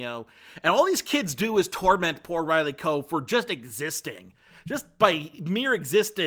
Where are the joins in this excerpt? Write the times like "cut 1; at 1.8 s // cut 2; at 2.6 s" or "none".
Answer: none